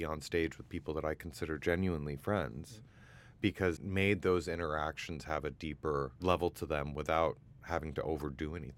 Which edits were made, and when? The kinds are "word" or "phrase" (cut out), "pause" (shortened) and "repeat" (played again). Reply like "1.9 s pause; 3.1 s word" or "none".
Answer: 3.8 s word